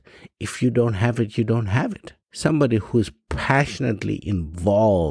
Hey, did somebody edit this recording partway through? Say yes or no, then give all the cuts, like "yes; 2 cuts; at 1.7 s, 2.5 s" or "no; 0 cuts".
yes; 1 cut; at 2.2 s